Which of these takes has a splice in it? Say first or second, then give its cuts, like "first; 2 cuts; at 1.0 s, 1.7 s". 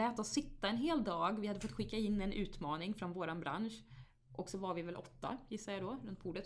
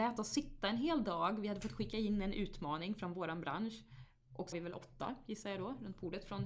second; 1 cut; at 4.5 s